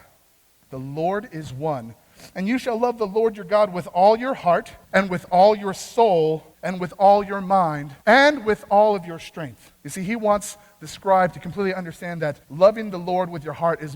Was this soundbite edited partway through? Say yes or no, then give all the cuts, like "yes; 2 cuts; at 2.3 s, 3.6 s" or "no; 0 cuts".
yes; 5 cuts; at 4.8 s, 6.5 s, 8.0 s, 9.7 s, 12.4 s